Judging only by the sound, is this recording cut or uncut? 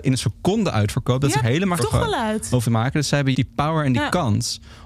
cut